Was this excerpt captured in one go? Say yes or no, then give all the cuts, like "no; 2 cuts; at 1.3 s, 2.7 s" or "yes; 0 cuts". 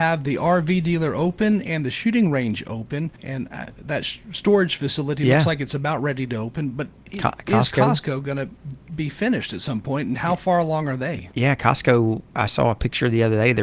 no; 1 cut; at 3.2 s